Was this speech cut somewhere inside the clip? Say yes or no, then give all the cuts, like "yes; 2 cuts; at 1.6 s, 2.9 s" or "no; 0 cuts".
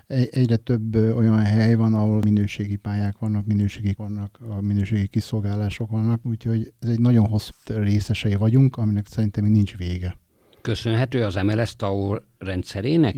yes; 2 cuts; at 4.0 s, 7.5 s